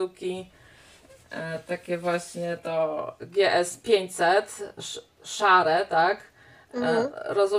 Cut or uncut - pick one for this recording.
uncut